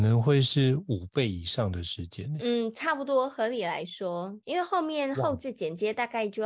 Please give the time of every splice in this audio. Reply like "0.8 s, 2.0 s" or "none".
4.4 s